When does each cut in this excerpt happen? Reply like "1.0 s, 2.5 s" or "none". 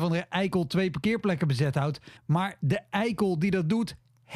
2.2 s

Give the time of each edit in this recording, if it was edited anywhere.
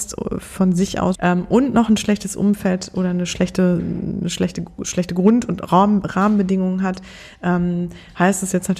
1.1 s

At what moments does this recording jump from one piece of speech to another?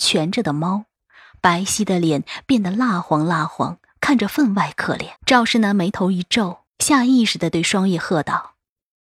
5.2 s, 6.7 s

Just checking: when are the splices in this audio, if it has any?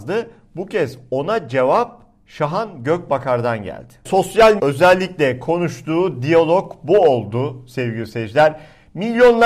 4.6 s

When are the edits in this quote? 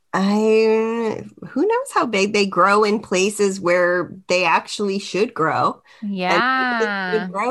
none

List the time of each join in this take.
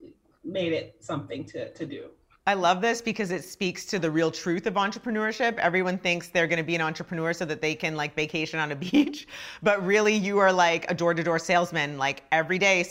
none

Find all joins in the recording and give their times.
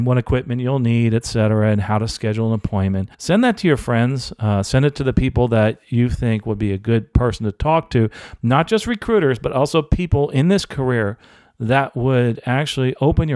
3.1 s

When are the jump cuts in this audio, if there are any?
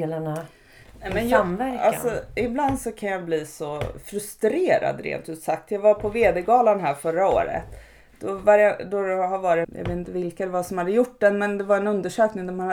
9.6 s

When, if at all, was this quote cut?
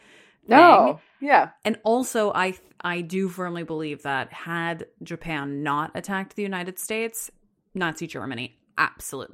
none

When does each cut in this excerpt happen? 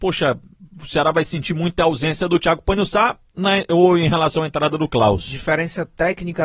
none

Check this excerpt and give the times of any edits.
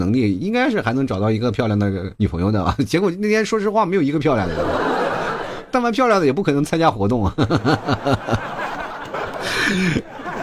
2.2 s

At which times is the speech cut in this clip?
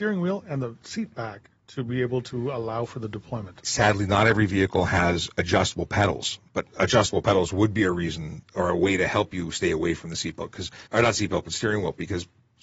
1.6 s, 10.9 s

